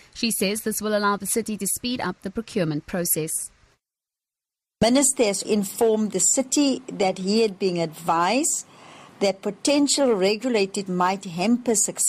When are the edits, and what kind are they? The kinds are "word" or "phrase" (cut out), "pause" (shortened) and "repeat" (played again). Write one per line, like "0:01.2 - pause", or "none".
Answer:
0:05.4 - word
0:10.9 - word